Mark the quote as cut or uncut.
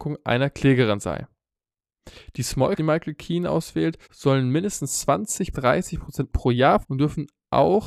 cut